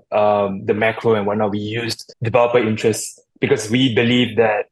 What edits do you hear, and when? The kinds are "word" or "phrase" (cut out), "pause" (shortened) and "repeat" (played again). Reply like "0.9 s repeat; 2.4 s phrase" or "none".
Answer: 2.1 s pause